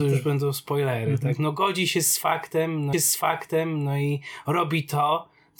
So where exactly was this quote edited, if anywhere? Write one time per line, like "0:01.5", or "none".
0:02.9

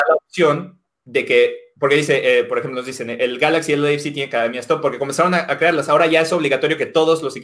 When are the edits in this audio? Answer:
none

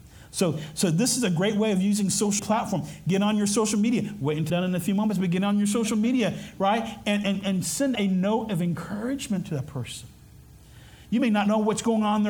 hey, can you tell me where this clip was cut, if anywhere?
0:02.4
0:04.5
0:07.2
0:07.9

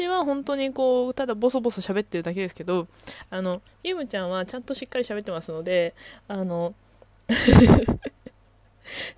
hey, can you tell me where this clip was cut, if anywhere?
none

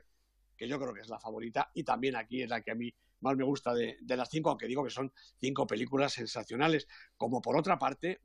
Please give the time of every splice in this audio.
none

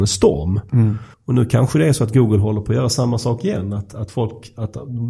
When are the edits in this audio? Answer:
0:01.1

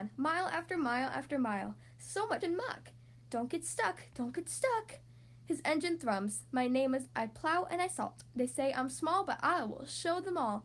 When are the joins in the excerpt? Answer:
0:02.4
0:07.1

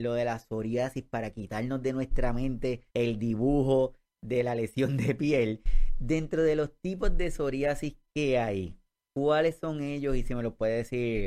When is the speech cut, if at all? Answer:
0:02.9

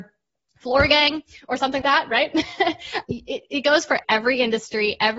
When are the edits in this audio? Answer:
0:01.8
0:03.0
0:04.0

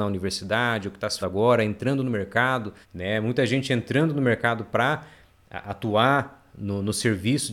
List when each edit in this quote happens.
0:01.2
0:02.8

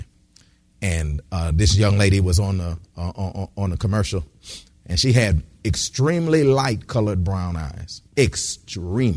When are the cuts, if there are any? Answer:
0:08.1

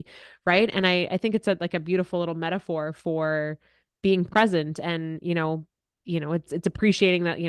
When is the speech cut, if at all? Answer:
0:06.5

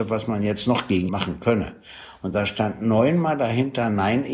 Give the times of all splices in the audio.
0:01.1

